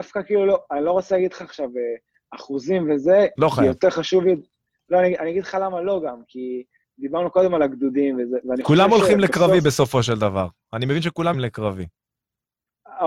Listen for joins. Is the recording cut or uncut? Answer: cut